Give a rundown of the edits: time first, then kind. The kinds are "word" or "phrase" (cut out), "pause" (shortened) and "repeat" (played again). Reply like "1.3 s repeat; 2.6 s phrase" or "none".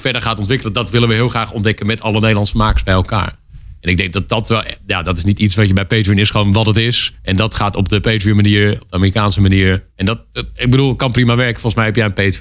7.2 s pause; 9.9 s pause

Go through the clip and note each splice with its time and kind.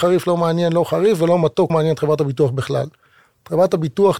1.7 s word

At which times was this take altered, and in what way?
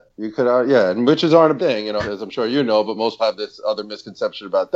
1.6 s word; 2.0 s word; 3.2 s word

